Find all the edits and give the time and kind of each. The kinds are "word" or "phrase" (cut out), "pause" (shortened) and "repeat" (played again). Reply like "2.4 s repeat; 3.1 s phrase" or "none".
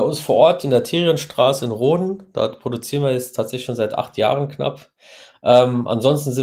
none